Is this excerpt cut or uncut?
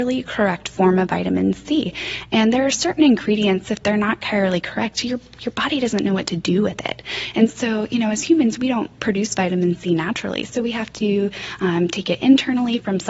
uncut